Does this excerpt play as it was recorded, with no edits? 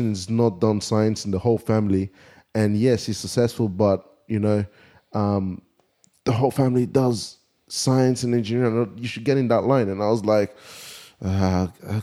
yes; 0 cuts

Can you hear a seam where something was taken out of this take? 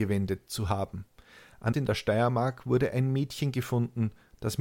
yes; 1 cut; at 1.7 s

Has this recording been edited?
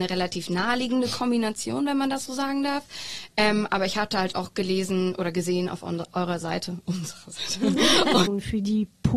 no; 0 cuts

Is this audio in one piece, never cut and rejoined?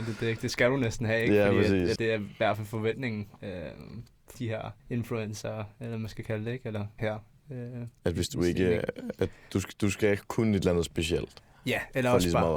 no; 4 cuts; at 2.0 s, 4.3 s, 4.8 s, 7.0 s

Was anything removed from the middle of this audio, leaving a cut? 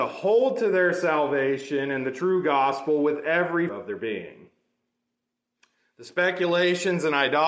yes; 1 cut; at 3.7 s

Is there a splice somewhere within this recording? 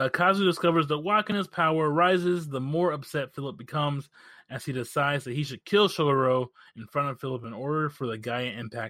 no; 0 cuts

